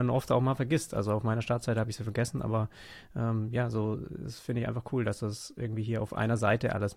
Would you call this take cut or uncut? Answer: uncut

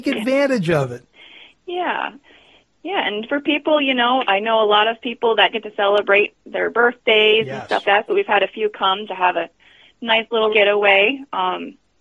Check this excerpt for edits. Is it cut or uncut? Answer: cut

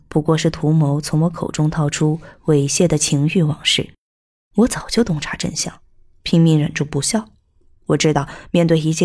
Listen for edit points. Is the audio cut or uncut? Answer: uncut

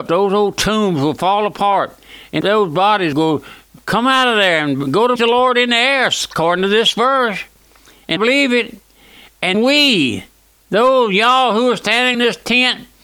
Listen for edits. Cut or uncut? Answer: cut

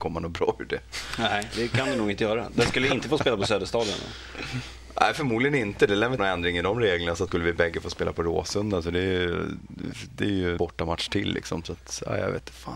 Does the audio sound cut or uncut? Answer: cut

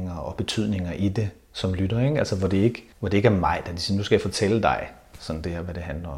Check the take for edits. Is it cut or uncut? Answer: cut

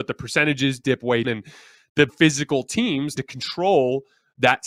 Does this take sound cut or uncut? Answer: cut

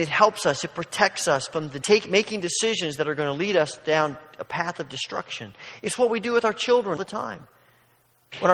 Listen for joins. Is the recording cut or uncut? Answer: cut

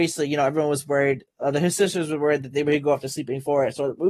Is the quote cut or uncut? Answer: uncut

